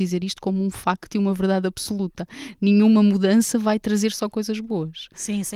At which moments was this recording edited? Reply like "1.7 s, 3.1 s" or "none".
none